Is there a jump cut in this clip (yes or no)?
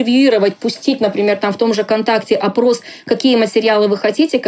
no